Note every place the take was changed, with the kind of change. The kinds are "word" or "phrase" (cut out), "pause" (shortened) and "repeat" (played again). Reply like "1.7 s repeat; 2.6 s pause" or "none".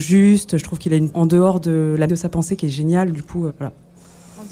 1.1 s word; 2.1 s word; 3.5 s word